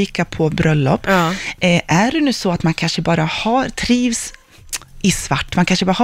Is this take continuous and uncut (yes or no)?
yes